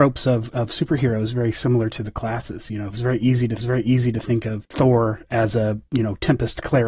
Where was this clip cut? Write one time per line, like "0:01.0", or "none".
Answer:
0:03.6